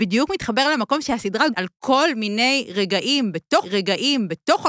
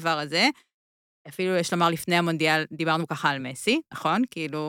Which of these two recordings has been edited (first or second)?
first